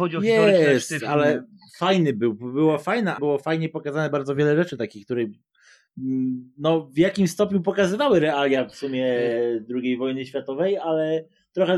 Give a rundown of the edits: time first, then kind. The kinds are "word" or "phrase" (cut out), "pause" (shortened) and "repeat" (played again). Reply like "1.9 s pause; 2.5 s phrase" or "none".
3.2 s word